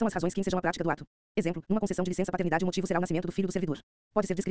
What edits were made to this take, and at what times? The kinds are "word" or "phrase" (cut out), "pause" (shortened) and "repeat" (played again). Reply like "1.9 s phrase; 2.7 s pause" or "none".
none